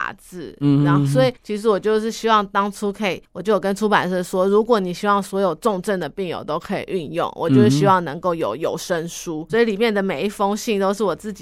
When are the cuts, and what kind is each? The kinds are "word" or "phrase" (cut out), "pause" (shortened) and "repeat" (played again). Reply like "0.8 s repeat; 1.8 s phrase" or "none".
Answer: 1.4 s pause; 3.2 s pause; 9.5 s word